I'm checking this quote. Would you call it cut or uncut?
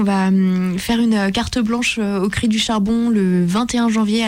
uncut